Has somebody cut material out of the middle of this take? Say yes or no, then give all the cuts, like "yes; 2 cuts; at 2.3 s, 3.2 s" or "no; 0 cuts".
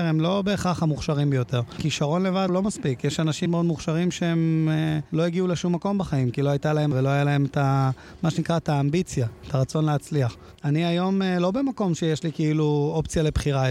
yes; 3 cuts; at 2.5 s, 3.5 s, 6.9 s